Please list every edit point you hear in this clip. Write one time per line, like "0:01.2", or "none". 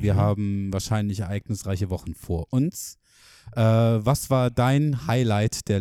none